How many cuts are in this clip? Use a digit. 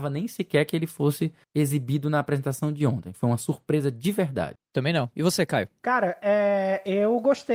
1